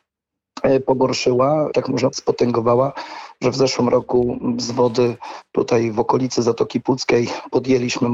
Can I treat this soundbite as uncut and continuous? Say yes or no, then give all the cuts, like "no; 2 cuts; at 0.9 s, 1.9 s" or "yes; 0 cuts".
no; 2 cuts; at 1.7 s, 2.1 s